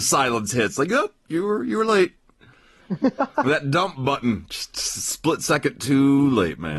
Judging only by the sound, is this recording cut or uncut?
uncut